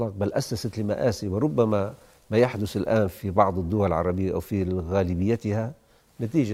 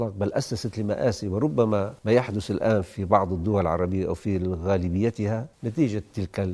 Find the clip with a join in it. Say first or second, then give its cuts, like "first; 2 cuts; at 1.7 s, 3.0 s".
second; 2 cuts; at 2.0 s, 5.5 s